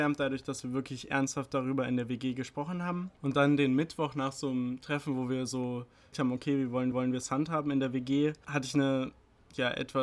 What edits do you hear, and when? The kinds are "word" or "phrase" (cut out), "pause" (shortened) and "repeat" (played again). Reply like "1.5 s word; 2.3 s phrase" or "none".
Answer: 6.1 s word; 6.9 s repeat